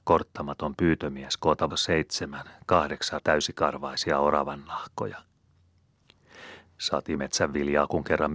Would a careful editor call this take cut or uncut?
cut